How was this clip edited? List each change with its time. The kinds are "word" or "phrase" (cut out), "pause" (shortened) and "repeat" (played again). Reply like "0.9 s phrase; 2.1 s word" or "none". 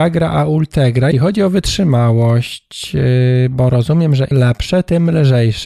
1.1 s word; 4.3 s word